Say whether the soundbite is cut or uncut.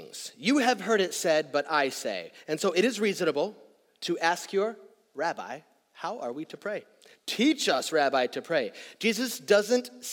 uncut